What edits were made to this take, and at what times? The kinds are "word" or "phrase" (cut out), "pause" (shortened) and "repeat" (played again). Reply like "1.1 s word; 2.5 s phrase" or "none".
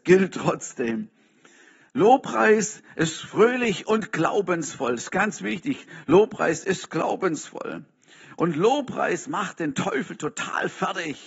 none